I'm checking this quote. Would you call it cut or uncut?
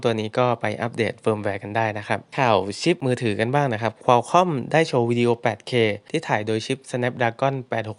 uncut